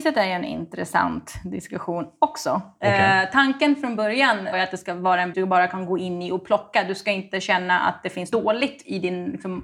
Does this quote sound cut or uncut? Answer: cut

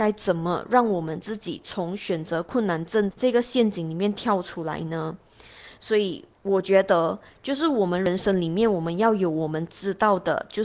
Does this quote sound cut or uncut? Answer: uncut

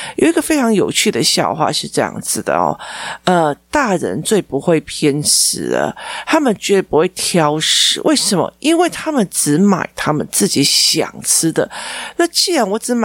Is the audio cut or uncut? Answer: uncut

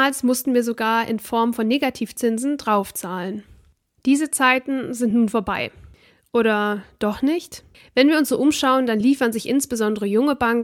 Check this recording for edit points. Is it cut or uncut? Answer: uncut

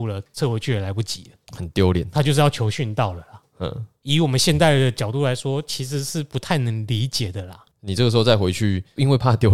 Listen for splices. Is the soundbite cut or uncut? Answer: uncut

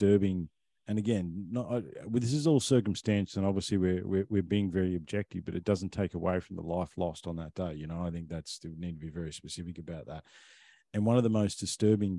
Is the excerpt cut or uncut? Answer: uncut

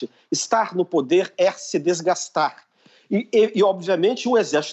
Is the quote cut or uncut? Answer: uncut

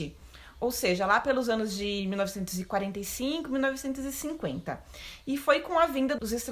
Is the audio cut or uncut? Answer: uncut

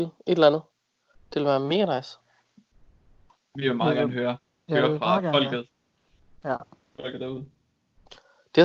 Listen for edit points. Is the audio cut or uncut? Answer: uncut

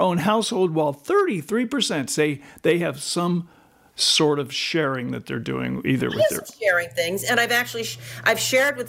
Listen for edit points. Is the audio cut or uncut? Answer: uncut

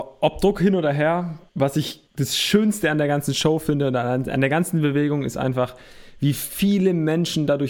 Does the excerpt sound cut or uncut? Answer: cut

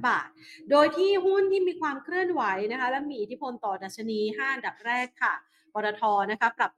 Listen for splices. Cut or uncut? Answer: uncut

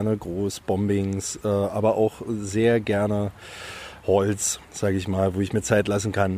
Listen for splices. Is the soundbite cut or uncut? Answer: cut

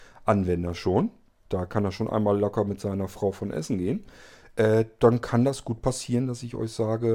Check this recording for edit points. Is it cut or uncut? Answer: uncut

